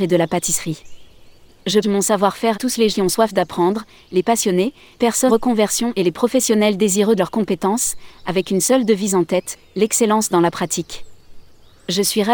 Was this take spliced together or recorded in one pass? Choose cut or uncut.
cut